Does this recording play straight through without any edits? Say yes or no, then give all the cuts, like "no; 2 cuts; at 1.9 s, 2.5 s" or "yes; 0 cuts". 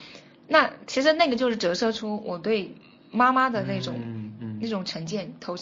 yes; 0 cuts